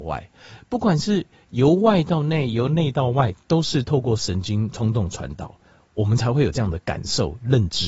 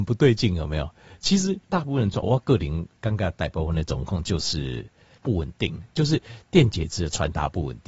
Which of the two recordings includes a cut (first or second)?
second